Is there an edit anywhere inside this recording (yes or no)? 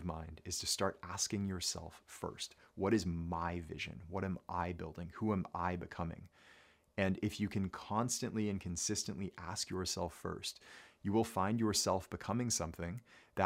no